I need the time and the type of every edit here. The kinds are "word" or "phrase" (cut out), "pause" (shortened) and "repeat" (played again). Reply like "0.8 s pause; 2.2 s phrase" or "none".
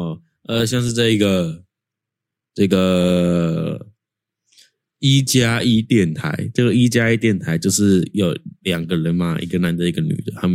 none